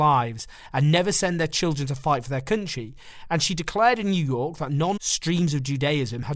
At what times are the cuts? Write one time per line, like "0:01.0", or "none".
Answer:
0:05.0